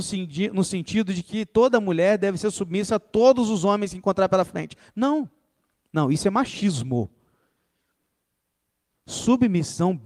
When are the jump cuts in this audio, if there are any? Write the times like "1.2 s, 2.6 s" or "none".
none